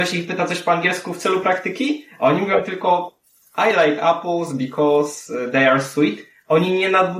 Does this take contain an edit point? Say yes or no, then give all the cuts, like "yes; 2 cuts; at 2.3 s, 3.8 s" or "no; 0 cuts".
no; 0 cuts